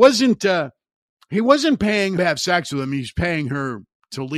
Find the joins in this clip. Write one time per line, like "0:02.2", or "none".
0:02.2